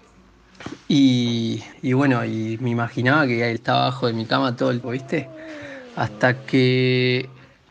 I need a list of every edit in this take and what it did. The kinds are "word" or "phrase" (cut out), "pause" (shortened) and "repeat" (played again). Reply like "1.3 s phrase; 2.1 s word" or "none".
1.7 s pause; 3.6 s word; 4.8 s word